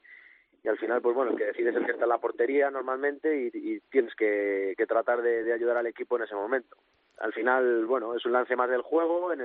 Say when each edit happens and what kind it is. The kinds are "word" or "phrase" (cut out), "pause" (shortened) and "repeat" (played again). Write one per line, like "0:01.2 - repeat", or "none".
none